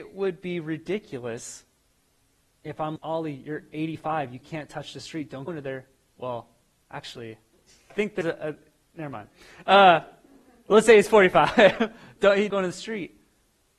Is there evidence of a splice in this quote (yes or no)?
yes